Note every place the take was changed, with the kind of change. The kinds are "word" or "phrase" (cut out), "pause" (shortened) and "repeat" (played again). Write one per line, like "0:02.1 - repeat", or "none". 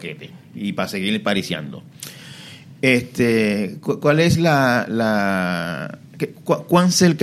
none